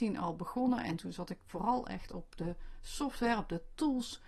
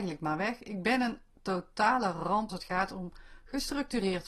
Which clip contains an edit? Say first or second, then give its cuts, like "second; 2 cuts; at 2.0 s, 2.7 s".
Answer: second; 1 cut; at 2.5 s